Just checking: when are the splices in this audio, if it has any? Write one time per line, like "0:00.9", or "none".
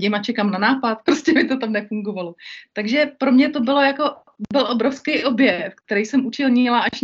0:01.1